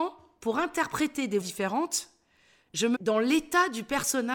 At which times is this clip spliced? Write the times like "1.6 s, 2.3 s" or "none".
1.4 s, 2.9 s